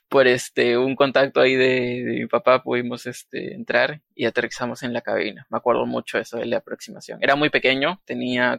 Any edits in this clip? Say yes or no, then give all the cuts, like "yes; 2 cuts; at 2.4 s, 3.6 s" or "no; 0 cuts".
no; 0 cuts